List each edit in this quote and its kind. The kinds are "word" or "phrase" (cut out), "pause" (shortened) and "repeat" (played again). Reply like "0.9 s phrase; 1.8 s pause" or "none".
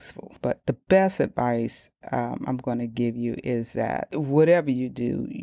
none